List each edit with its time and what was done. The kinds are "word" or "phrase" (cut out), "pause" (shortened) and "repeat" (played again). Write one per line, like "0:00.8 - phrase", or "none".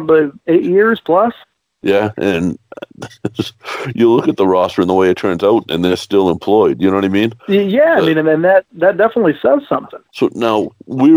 0:01.4 - pause
0:07.4 - pause
0:10.1 - pause